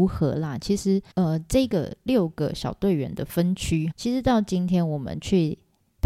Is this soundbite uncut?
no; 2 cuts; at 1.1 s, 3.9 s

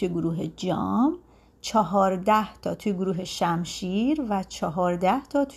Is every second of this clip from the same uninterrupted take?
yes; 0 cuts

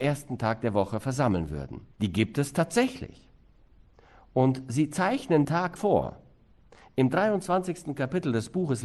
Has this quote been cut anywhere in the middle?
yes; 3 cuts; at 1.9 s, 5.4 s, 5.8 s

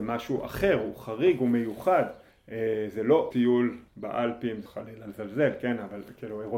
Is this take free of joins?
no; 4 cuts; at 2.3 s, 3.3 s, 3.9 s, 4.7 s

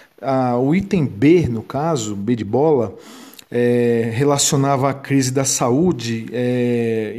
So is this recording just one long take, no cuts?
yes; 0 cuts

